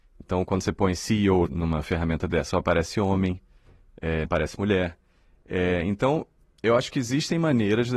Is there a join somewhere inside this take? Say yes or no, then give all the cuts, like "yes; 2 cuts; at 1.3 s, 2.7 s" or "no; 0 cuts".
yes; 3 cuts; at 1.5 s, 2.5 s, 4.2 s